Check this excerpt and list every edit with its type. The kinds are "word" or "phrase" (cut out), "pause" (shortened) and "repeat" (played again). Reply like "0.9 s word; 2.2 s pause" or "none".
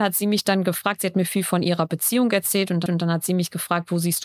2.9 s repeat